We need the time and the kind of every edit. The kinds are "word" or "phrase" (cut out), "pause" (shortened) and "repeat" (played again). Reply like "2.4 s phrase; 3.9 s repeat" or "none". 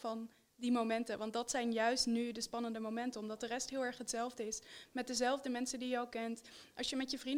none